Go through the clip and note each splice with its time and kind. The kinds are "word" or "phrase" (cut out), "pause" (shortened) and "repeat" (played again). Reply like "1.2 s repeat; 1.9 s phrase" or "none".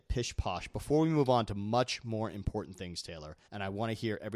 3.4 s pause